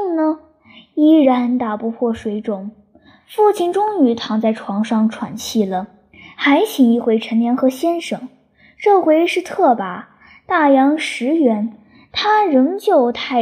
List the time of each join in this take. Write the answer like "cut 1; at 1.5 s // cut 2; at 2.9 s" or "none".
none